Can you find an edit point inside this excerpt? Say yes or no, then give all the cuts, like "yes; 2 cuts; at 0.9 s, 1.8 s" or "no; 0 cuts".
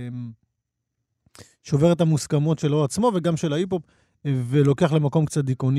no; 0 cuts